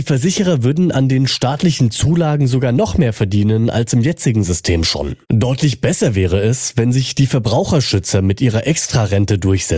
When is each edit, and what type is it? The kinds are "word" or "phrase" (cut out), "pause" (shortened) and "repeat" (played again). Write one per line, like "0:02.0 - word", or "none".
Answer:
0:05.2 - pause